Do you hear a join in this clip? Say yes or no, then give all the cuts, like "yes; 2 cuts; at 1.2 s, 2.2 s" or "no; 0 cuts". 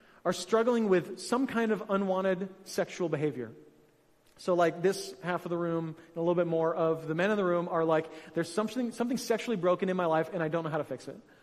no; 0 cuts